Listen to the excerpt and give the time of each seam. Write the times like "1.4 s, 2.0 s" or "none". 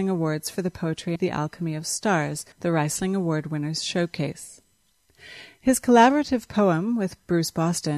1.2 s, 2.5 s